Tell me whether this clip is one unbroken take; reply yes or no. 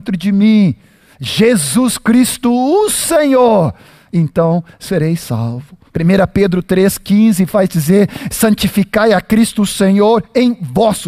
no